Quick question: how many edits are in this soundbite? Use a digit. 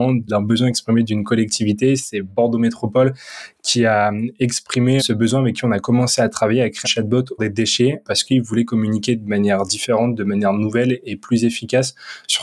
4